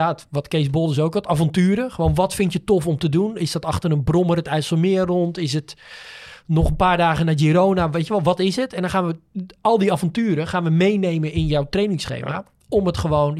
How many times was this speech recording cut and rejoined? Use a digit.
0